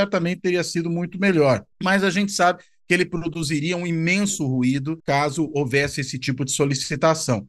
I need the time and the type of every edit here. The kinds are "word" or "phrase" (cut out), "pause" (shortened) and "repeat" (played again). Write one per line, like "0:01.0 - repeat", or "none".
0:01.7 - pause
0:05.0 - pause